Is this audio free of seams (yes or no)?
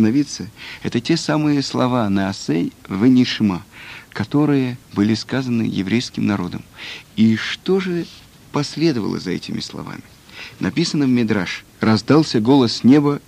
no